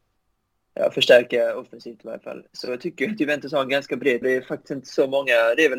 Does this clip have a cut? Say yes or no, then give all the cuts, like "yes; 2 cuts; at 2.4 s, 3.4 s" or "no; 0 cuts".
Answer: yes; 1 cut; at 4.2 s